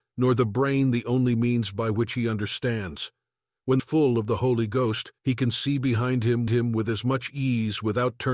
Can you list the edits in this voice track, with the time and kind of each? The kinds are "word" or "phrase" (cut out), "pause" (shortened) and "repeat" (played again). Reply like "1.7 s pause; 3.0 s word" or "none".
3.8 s phrase; 5.2 s pause; 6.5 s repeat

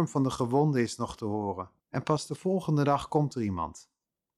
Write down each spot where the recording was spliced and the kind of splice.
1.8 s pause

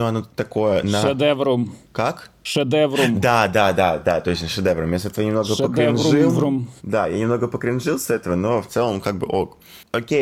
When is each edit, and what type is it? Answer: 1.8 s pause; 6.8 s pause

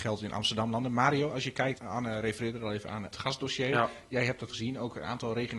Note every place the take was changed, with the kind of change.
1.8 s word; 3.1 s word; 4.5 s word

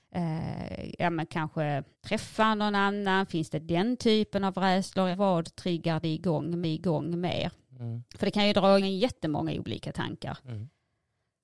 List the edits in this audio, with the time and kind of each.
1.9 s pause; 5.1 s word; 6.6 s repeat; 8.1 s pause; 8.8 s word

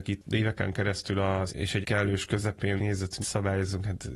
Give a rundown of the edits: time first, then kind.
1.5 s word; 1.8 s word; 2.8 s word; 3.2 s word

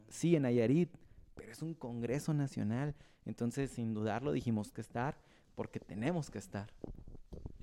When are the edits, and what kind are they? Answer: 4.7 s word

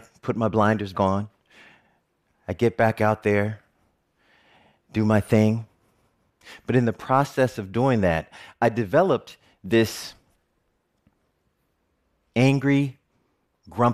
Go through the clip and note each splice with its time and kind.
0.9 s word

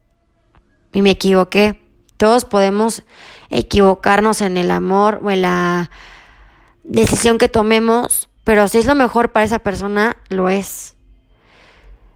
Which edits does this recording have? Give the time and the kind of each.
8.4 s pause

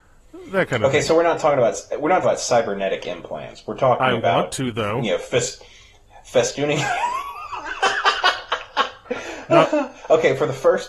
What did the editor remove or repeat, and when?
2.2 s word

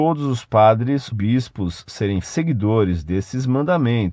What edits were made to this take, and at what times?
1.1 s word; 2.2 s word

